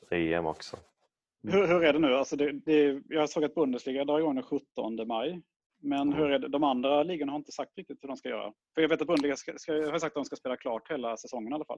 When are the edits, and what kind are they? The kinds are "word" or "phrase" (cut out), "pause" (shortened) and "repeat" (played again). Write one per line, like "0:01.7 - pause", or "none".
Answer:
none